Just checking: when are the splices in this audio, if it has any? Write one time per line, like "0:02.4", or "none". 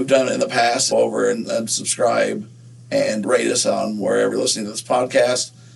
0:00.9
0:03.2
0:04.3